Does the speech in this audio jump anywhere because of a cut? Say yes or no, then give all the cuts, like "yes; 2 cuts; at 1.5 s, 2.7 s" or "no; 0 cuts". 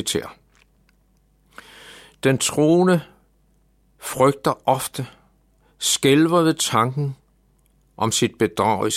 no; 0 cuts